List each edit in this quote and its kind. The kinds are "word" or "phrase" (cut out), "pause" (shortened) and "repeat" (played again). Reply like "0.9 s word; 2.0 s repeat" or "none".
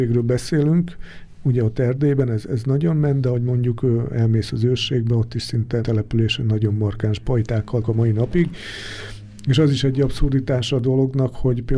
5.8 s word; 7.8 s word